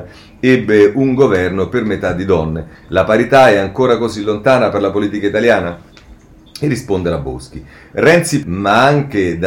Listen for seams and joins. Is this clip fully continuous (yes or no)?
no